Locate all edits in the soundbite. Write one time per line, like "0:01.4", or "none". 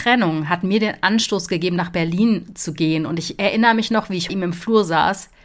0:04.3